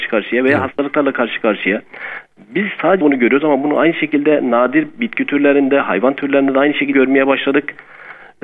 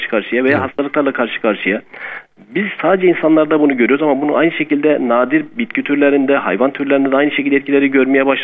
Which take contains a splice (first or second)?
first